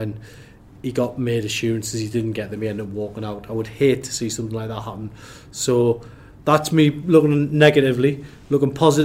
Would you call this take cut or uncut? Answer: uncut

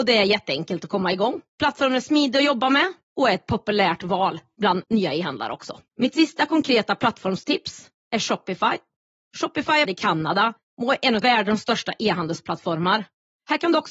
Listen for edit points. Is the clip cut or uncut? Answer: cut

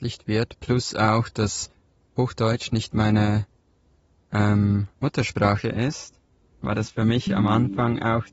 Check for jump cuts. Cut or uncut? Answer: uncut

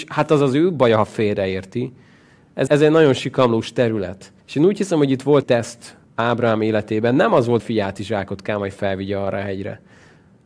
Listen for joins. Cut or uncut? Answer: cut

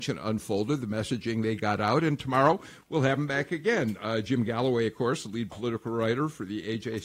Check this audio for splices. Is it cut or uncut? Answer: uncut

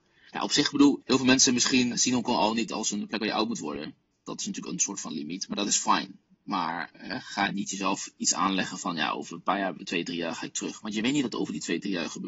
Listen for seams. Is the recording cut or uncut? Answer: cut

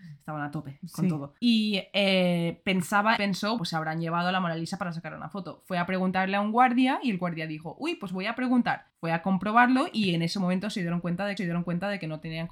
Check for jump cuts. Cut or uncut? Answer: cut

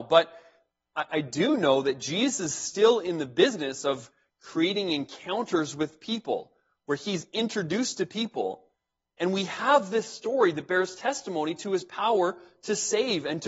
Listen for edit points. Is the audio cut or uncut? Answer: uncut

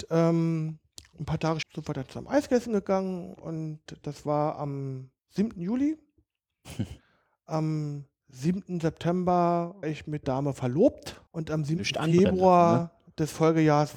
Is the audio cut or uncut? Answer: cut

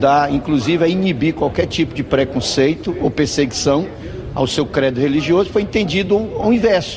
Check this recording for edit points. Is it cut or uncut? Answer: uncut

